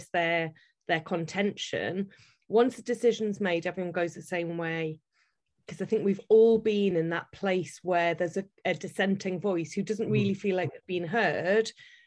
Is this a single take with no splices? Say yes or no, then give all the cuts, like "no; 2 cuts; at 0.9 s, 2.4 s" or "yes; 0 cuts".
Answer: yes; 0 cuts